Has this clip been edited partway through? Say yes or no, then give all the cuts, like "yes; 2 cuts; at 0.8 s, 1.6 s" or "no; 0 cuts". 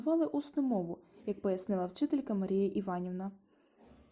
no; 0 cuts